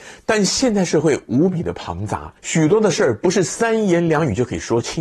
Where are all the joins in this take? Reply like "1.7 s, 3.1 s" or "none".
2.4 s